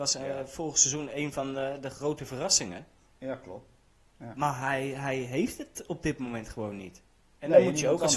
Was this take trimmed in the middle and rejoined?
no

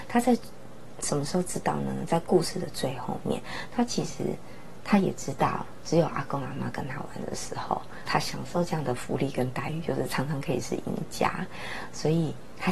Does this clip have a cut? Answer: yes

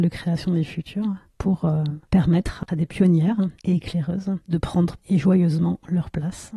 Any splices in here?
yes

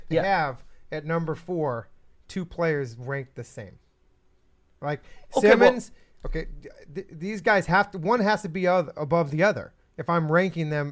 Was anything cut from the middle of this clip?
no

